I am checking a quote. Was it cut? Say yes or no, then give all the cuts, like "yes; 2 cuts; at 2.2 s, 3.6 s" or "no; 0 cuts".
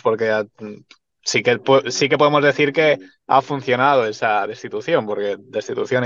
no; 0 cuts